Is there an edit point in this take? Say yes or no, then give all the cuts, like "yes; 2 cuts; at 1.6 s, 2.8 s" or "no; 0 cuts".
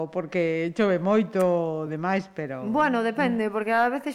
no; 0 cuts